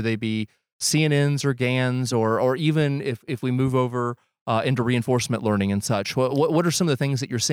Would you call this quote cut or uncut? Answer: uncut